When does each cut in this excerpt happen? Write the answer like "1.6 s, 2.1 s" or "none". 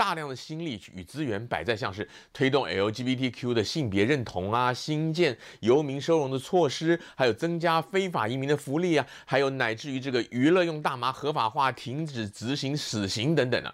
none